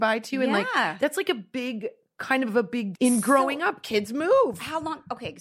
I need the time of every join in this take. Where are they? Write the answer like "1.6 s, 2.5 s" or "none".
2.9 s